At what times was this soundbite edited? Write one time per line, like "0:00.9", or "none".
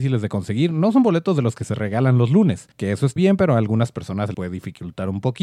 0:02.7
0:03.2
0:04.3